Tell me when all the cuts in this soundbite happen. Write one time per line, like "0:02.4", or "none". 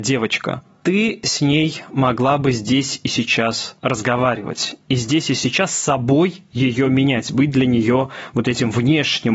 0:03.8